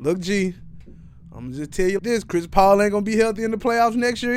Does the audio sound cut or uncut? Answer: cut